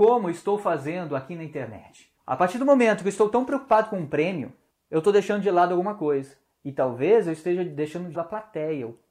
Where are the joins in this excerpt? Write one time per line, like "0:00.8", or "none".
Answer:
0:08.1